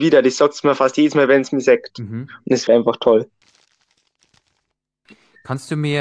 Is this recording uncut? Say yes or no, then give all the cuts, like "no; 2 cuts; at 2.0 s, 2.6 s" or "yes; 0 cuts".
no; 1 cut; at 2.7 s